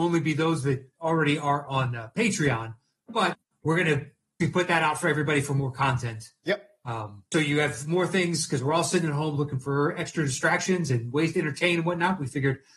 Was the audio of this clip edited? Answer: yes; 2 cuts; at 4.4 s, 7.3 s

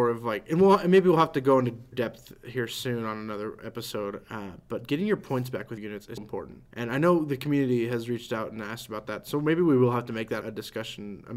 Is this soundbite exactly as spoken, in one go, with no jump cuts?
no; 5 cuts; at 1.9 s, 5.8 s, 6.2 s, 6.7 s, 10.4 s

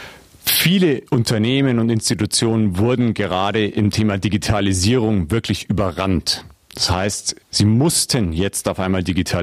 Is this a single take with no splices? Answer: no; 2 cuts; at 1.1 s, 7.4 s

